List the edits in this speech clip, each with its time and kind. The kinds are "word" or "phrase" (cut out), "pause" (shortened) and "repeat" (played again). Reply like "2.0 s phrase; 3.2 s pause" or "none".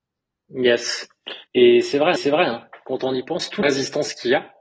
1.5 s pause; 2.2 s repeat; 3.6 s word